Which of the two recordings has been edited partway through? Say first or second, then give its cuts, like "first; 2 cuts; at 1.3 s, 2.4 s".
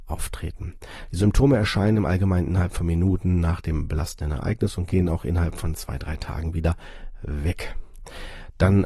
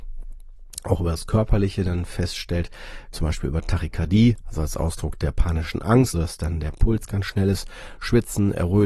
second; 2 cuts; at 3.1 s, 6.1 s